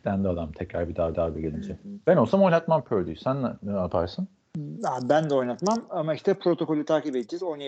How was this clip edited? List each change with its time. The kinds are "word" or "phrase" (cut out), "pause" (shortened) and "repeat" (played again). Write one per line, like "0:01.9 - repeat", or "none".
0:01.1 - repeat